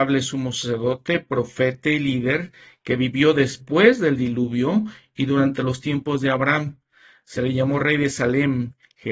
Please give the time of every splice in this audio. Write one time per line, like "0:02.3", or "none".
none